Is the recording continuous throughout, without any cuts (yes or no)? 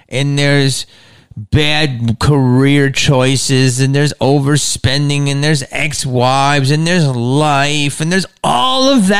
yes